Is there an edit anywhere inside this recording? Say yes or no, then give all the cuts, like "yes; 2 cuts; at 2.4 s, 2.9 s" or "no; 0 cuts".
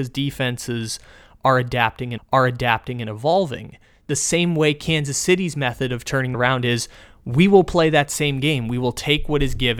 yes; 2 cuts; at 2.2 s, 6.3 s